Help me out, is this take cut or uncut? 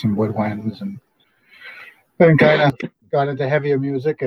uncut